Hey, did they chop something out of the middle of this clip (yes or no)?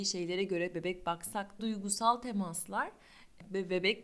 yes